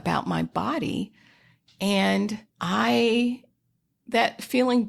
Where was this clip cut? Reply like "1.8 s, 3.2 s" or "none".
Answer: 2.5 s